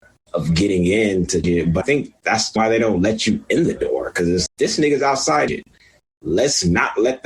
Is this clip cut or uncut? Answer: cut